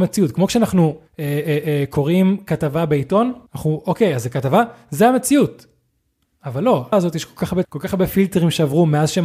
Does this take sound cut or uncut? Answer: cut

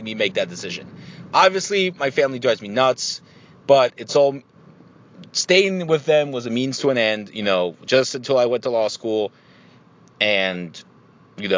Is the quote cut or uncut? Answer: uncut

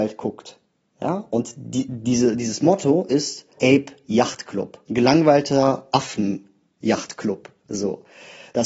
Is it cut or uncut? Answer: cut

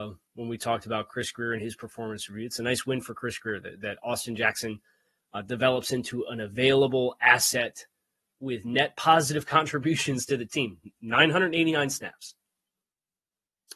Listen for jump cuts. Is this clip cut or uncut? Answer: uncut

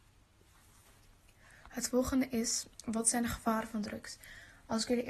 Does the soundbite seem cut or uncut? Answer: cut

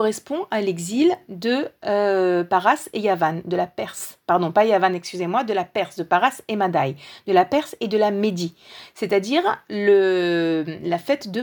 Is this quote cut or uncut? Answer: uncut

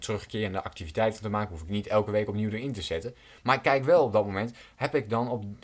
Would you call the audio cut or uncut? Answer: uncut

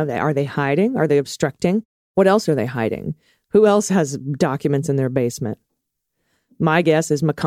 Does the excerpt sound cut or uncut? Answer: uncut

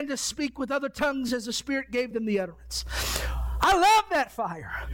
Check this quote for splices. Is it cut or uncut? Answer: uncut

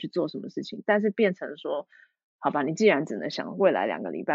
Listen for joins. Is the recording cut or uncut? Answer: uncut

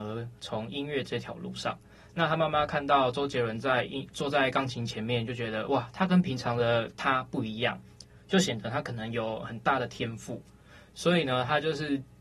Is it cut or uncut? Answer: uncut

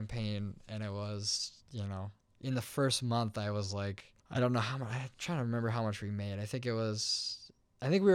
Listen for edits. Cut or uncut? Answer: cut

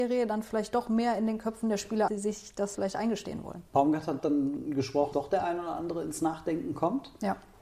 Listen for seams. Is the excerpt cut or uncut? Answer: cut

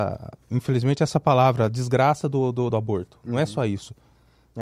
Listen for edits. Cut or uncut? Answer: cut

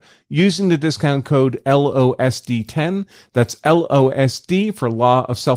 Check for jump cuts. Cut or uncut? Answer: uncut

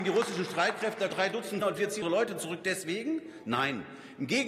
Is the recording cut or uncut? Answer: cut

